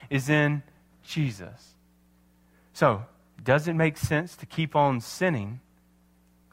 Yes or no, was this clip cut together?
no